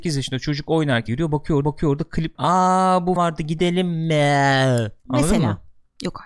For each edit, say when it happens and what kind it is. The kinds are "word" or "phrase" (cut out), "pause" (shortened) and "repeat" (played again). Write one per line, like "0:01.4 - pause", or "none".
0:01.1 - word
0:01.6 - repeat
0:02.3 - word
0:03.2 - word
0:05.0 - pause